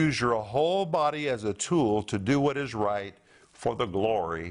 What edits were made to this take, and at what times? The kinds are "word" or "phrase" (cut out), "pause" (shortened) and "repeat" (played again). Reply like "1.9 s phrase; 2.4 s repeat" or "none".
none